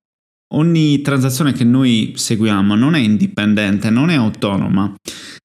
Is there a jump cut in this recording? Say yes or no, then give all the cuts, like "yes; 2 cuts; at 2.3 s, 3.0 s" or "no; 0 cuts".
no; 0 cuts